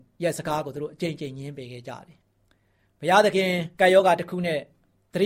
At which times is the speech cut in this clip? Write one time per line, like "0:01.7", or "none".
0:02.2
0:03.7